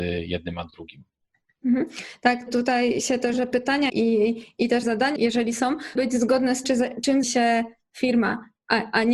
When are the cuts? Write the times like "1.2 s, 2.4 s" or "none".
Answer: 2.5 s, 3.3 s, 3.9 s, 4.8 s, 5.2 s, 5.9 s, 6.6 s, 7.2 s